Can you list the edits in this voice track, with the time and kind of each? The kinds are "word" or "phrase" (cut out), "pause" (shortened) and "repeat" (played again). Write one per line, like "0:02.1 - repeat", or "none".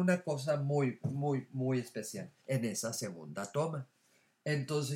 0:02.4 - pause